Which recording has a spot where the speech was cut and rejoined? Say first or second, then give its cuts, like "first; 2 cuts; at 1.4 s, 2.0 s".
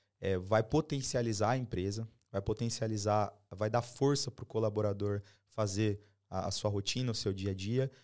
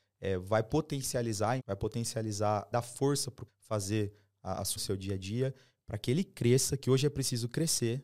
second; 4 cuts; at 1.6 s, 2.7 s, 3.5 s, 4.8 s